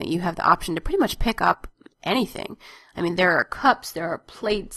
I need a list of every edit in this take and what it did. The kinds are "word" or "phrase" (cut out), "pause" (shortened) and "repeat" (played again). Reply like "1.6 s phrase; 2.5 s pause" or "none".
none